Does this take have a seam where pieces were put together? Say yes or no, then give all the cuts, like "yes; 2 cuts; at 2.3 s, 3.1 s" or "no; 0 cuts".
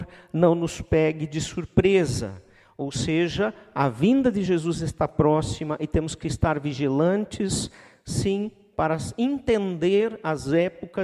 no; 0 cuts